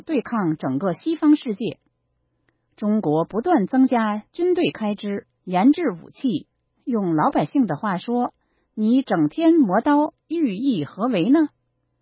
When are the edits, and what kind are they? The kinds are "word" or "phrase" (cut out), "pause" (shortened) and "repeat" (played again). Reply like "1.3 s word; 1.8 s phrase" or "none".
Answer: 5.4 s pause; 10.2 s pause